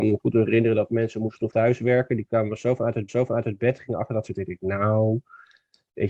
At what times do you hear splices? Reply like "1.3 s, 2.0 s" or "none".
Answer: 1.5 s, 3.1 s, 4.3 s